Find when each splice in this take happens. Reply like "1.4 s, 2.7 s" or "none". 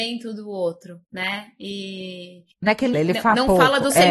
1.0 s, 2.5 s, 2.9 s